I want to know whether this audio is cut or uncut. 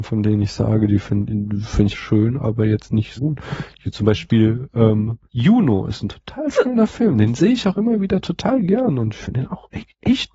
cut